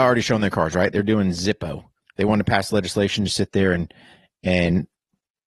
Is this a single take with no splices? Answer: no; 1 cut; at 2.0 s

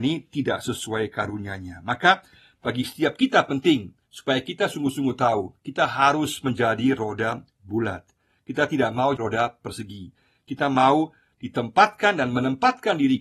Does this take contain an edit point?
yes; 2 cuts; at 4.0 s, 9.2 s

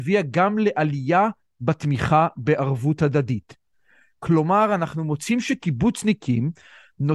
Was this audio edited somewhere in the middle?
no; 0 cuts

